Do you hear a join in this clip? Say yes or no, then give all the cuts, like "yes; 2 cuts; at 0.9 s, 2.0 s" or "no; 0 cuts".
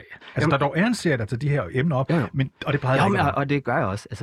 no; 0 cuts